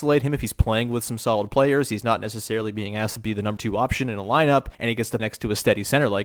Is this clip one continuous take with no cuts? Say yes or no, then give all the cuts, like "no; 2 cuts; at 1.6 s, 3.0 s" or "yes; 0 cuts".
no; 3 cuts; at 3.6 s, 4.7 s, 5.2 s